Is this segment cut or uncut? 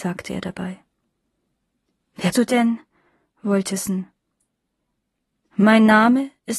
cut